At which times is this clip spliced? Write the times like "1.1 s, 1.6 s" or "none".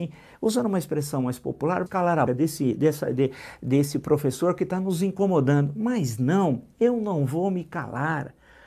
1.9 s, 2.3 s